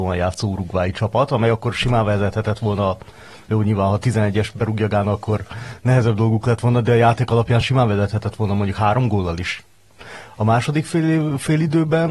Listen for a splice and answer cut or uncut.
uncut